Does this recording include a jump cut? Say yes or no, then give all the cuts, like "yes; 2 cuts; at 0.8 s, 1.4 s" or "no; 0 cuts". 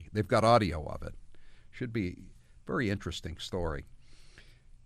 no; 0 cuts